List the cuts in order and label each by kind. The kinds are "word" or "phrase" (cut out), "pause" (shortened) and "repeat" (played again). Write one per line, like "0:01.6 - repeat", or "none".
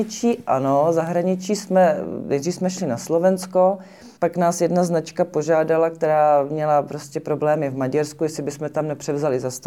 0:04.2 - pause